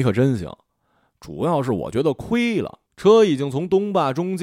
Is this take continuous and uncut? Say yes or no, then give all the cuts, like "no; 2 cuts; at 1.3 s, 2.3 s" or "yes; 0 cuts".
no; 1 cut; at 2.9 s